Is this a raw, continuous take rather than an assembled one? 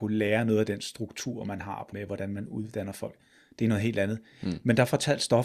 no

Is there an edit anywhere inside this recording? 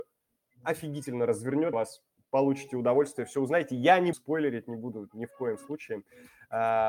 yes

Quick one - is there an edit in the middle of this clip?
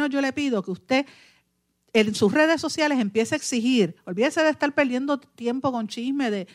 no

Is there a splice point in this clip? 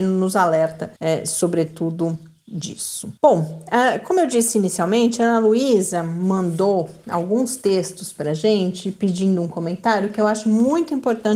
yes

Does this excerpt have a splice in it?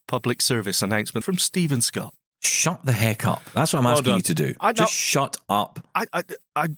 yes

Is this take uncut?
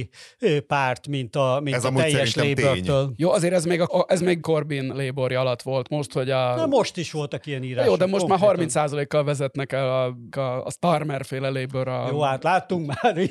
no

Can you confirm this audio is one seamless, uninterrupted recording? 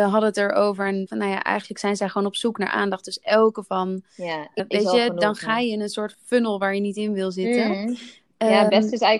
no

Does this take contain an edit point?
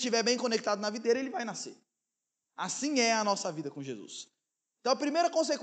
no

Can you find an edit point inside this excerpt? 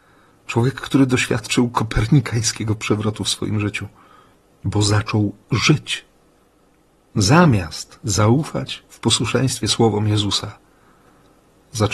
no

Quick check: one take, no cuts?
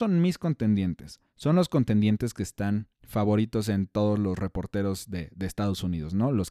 no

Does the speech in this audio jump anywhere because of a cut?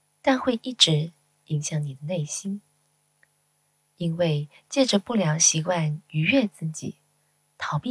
no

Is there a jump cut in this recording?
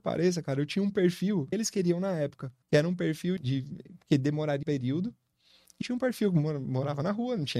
yes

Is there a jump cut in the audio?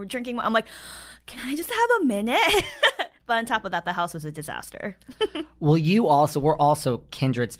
no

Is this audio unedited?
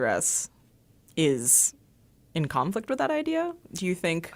yes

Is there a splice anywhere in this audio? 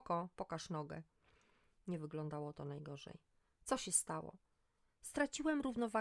no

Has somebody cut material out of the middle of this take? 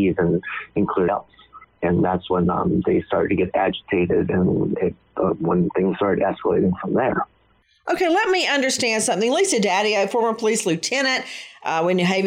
yes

